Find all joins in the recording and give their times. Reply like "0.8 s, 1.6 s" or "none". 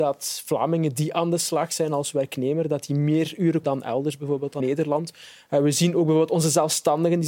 3.6 s, 4.6 s